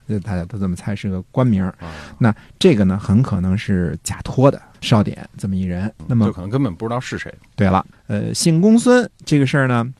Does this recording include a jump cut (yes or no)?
no